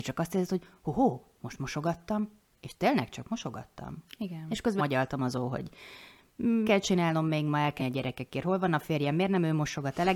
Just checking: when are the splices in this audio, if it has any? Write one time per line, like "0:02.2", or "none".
0:04.8
0:06.6
0:07.8